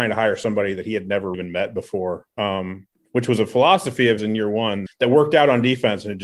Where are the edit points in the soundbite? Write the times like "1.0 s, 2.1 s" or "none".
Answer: 1.3 s, 4.2 s, 4.9 s